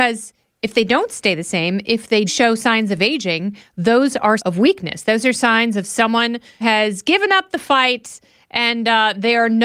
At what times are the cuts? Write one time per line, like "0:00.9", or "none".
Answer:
0:02.3
0:04.4
0:06.6